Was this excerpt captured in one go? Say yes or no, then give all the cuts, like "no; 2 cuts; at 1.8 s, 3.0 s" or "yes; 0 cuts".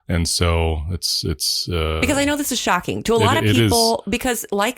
yes; 0 cuts